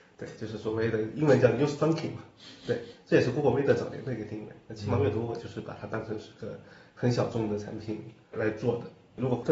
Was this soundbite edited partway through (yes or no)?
no